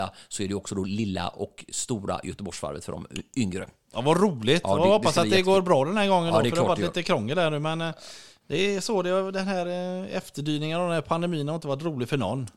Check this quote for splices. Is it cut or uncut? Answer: uncut